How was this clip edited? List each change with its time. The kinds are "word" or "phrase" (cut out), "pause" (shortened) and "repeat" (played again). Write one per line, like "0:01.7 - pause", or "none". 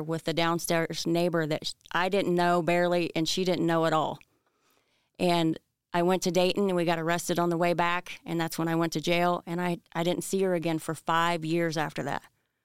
none